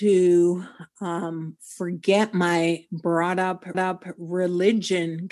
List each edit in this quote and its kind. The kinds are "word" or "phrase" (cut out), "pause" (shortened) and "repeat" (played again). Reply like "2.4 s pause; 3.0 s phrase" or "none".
3.7 s repeat

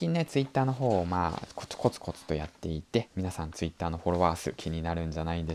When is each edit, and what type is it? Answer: none

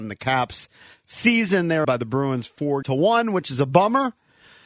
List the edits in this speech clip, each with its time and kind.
1.8 s word; 2.8 s word

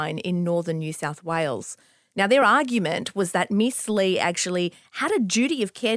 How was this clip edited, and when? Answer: none

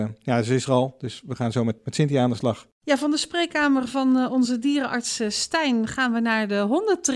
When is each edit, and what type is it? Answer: 1.8 s word

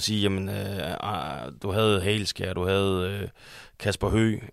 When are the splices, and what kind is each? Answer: none

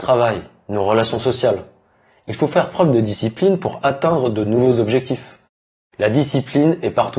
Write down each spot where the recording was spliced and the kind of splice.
none

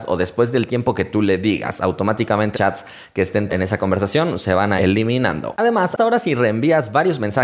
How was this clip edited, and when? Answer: 2.5 s word; 3.5 s word; 4.8 s word; 6.0 s word

